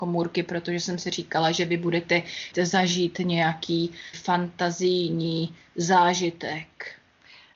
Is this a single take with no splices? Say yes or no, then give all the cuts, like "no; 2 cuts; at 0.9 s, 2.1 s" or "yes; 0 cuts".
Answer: no; 2 cuts; at 2.5 s, 4.1 s